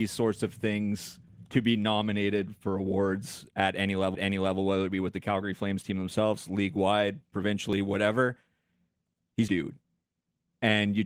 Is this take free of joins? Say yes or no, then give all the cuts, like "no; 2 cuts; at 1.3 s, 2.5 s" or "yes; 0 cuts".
no; 2 cuts; at 4.1 s, 9.5 s